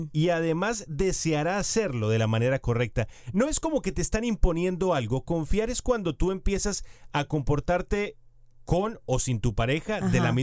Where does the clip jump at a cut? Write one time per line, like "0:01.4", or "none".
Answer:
none